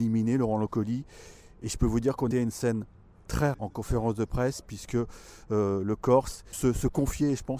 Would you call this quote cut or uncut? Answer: cut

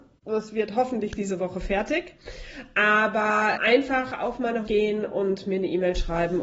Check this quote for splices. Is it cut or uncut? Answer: cut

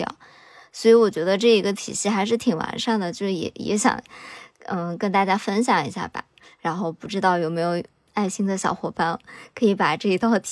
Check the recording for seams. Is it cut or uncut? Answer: uncut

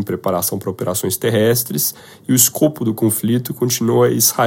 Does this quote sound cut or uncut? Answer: uncut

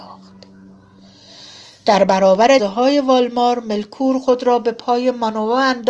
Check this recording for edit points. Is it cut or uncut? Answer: cut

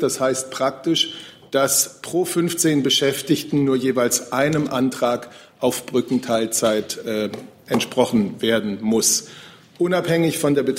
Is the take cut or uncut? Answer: uncut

